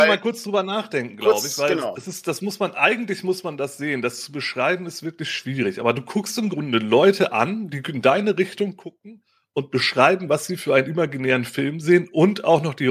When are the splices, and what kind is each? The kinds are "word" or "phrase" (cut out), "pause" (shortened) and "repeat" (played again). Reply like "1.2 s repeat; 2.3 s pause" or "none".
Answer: none